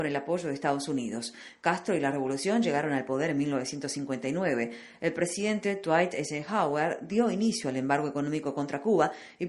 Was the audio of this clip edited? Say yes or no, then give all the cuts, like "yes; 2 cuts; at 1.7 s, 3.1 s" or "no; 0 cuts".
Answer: no; 0 cuts